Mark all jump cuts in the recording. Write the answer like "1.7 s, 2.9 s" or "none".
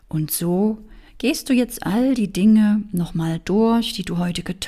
1.1 s